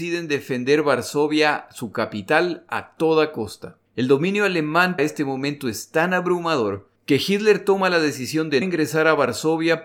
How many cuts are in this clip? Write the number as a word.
four